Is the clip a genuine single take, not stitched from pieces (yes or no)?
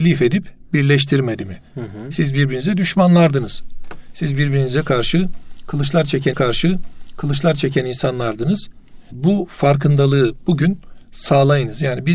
no